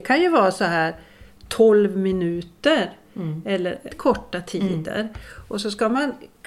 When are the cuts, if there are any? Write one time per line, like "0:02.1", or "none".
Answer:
0:03.9